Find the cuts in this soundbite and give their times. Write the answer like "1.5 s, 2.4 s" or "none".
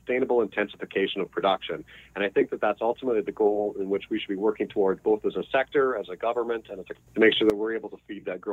6.9 s